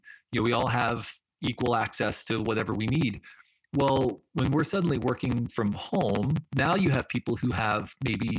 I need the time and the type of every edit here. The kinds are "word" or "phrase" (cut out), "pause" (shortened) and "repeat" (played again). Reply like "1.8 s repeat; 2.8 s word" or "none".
none